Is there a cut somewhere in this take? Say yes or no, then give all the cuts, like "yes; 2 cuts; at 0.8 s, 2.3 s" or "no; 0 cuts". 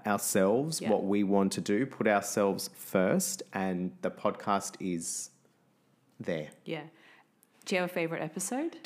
no; 0 cuts